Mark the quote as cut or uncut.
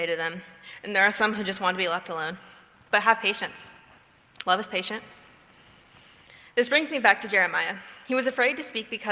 uncut